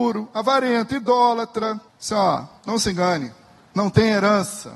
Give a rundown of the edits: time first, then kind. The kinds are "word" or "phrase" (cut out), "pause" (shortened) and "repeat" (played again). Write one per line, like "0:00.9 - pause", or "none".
0:01.9 - pause
0:02.6 - pause
0:03.6 - pause